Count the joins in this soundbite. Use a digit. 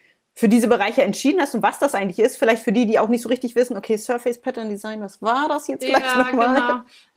0